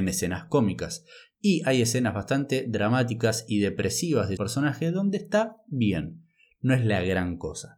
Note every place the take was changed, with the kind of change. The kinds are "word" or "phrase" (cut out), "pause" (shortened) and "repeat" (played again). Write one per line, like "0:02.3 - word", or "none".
0:04.4 - word